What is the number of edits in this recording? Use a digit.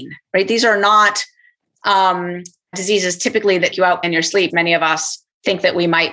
4